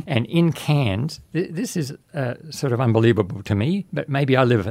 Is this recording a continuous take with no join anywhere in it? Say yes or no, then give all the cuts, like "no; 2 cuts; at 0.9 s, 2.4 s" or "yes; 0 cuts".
yes; 0 cuts